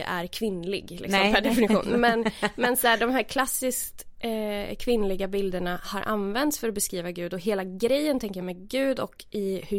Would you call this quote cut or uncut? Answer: uncut